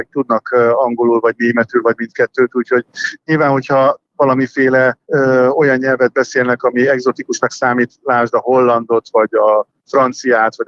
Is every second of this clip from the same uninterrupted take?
no; 1 cut; at 5.0 s

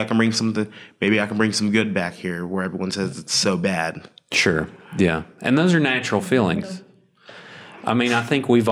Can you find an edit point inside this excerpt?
no; 0 cuts

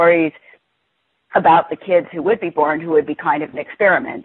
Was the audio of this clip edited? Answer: no; 0 cuts

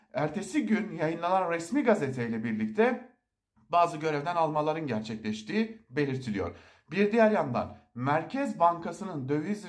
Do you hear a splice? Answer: no; 0 cuts

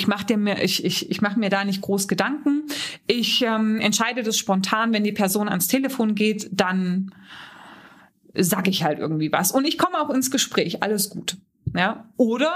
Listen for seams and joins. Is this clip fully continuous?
yes; 0 cuts

